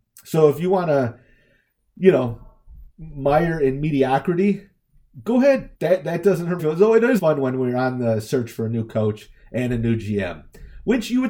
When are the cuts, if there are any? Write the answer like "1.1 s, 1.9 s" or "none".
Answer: 2.9 s, 5.7 s, 6.6 s, 7.2 s